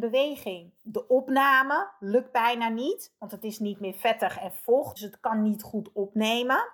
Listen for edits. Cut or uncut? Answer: cut